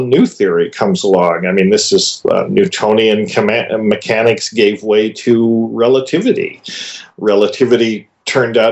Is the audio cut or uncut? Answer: uncut